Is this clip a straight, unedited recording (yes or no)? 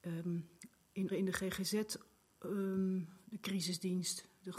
no